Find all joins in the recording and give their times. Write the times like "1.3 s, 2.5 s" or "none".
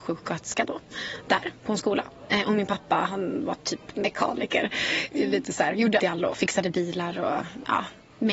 6.0 s